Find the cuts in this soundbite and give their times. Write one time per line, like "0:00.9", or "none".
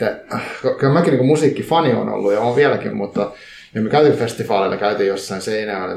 none